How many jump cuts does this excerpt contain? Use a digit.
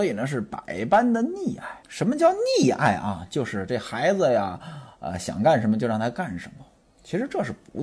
1